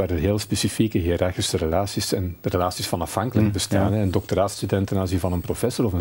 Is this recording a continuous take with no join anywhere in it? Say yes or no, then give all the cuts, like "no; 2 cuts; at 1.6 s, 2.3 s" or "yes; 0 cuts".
no; 1 cut; at 3.4 s